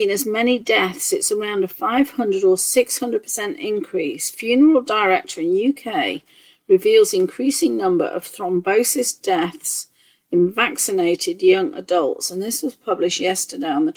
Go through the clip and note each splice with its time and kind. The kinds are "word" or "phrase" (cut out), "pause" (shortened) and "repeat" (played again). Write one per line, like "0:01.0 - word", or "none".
none